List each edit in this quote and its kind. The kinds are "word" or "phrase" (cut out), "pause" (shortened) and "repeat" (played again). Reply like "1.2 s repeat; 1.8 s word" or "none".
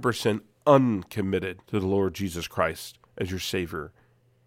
1.6 s pause; 3.1 s pause

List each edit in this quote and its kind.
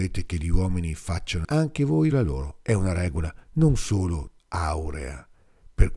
1.4 s phrase; 2.1 s word; 3.4 s pause; 4.4 s pause

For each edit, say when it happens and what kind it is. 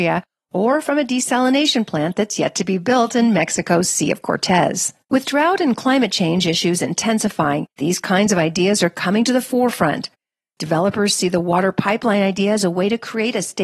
5.0 s pause; 7.7 s pause

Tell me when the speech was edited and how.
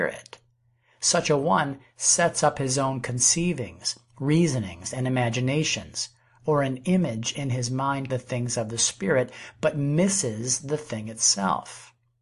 8.1 s word

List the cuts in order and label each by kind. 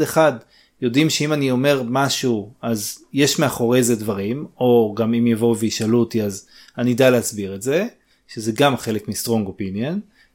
none

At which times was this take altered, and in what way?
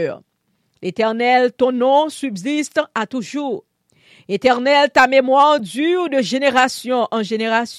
none

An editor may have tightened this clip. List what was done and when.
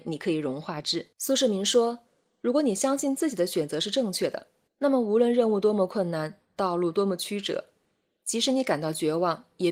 1.1 s pause; 4.7 s pause; 6.4 s pause

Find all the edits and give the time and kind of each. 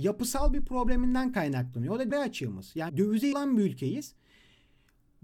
2.1 s word; 2.9 s word; 3.3 s word

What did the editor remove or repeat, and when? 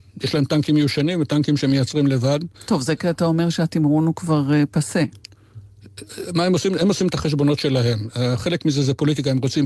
2.5 s pause

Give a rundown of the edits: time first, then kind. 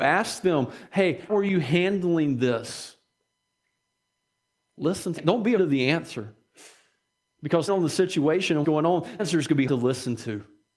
1.3 s word; 5.2 s word; 5.6 s word; 7.7 s word; 8.6 s word; 9.2 s word; 9.7 s word

